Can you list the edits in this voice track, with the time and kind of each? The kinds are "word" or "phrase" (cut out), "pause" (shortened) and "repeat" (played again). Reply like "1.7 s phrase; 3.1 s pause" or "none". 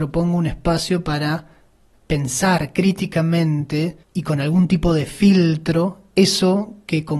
4.0 s pause